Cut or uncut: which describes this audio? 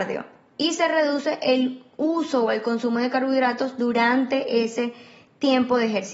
uncut